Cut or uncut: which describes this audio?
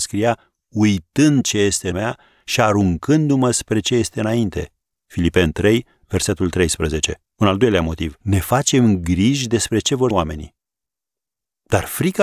cut